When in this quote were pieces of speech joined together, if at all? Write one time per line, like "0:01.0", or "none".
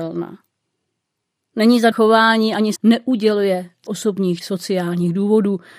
0:01.9
0:02.8
0:03.9
0:04.4